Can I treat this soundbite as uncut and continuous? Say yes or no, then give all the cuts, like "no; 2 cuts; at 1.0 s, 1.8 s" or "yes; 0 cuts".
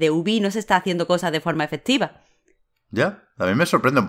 yes; 0 cuts